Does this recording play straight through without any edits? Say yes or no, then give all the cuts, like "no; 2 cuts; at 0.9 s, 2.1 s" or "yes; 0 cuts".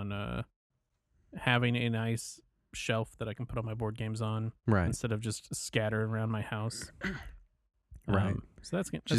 no; 1 cut; at 4.6 s